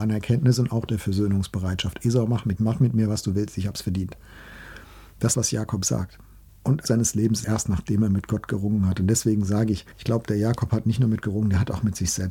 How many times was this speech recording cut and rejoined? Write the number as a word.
seven